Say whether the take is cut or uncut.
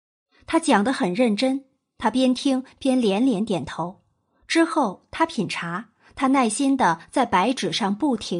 uncut